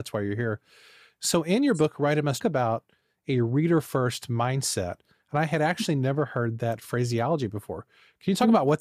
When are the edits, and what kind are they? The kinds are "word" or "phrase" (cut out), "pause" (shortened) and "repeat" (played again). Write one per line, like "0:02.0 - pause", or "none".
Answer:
0:02.4 - phrase